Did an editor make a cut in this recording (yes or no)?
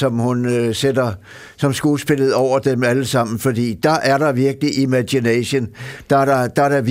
no